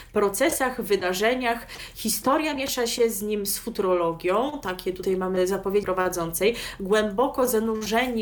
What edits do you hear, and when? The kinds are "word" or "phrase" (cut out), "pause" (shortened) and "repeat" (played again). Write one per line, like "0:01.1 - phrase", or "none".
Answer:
0:05.8 - word